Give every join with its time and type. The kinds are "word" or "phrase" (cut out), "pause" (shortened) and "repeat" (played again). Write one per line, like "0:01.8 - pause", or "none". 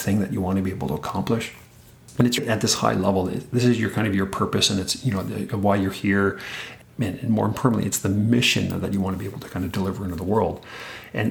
0:02.4 - word

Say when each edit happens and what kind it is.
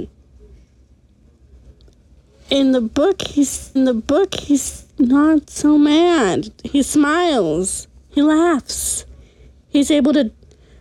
0:03.8 - repeat

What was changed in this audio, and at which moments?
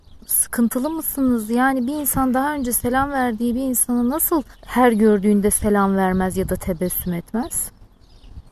0:04.5 - pause

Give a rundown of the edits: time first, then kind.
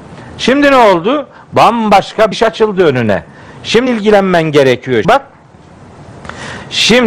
0:02.3 - word
0:03.9 - word
0:05.0 - word

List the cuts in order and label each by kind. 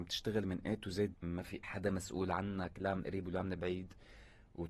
0:01.1 - word
0:01.6 - word

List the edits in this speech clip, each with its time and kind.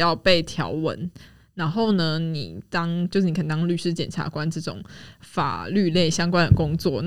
none

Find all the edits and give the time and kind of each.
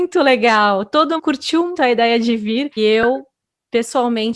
0:01.2 - word
0:01.7 - word
0:02.8 - word

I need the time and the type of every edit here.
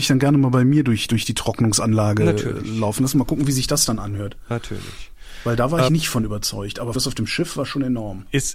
0:05.9 - word
0:06.9 - word

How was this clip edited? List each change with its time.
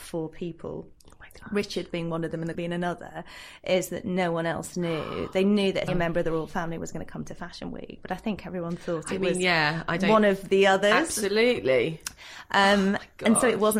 0:02.5 - word
0:05.9 - word

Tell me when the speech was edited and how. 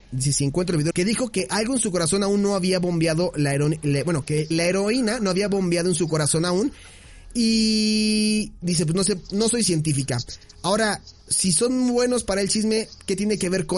0:00.9 - phrase
0:04.5 - word
0:11.2 - pause

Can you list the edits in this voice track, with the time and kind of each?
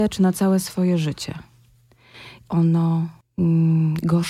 0:02.5 - phrase

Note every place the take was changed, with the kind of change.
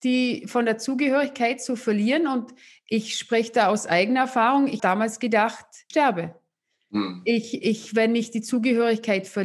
0:04.8 - word
0:05.9 - word
0:07.6 - word

